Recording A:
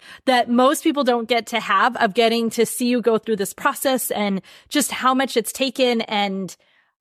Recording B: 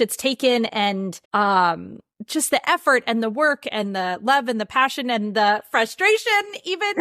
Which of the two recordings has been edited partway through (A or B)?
B